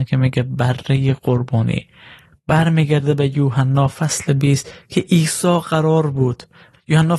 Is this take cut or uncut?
uncut